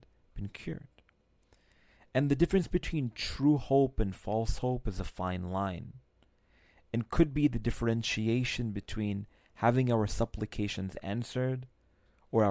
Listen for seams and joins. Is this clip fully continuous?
yes; 0 cuts

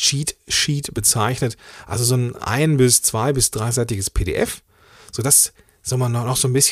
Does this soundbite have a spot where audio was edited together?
no; 0 cuts

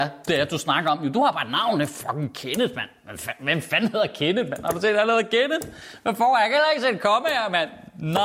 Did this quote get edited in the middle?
no; 0 cuts

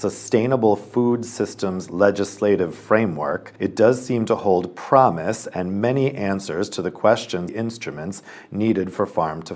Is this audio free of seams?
no; 2 cuts; at 3.6 s, 7.5 s

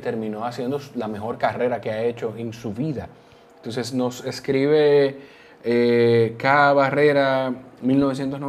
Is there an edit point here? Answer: no; 0 cuts

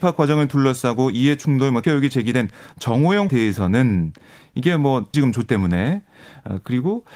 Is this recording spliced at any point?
yes; 4 cuts; at 1.8 s, 3.3 s, 5.1 s, 5.5 s

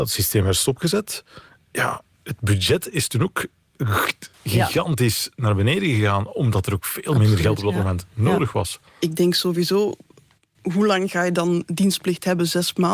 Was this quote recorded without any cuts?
yes; 0 cuts

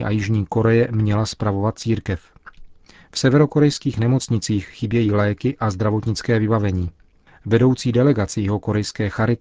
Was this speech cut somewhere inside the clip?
no; 0 cuts

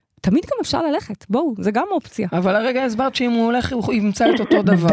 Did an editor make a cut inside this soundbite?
no; 0 cuts

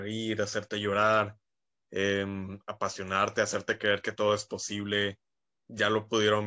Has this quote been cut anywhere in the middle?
no; 0 cuts

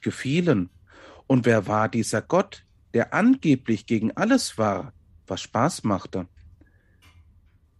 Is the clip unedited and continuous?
yes; 0 cuts

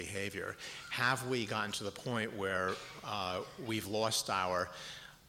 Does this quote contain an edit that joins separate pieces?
no; 0 cuts

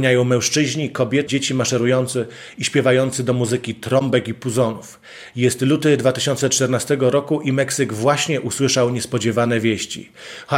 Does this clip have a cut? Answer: yes; 1 cut; at 1.3 s

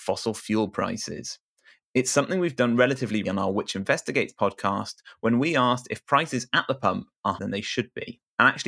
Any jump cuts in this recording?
yes; 2 cuts; at 3.2 s, 7.4 s

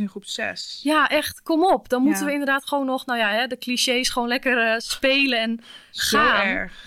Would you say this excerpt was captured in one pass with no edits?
yes; 0 cuts

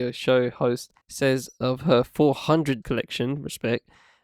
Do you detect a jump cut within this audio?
yes; 2 cuts; at 1.0 s, 2.8 s

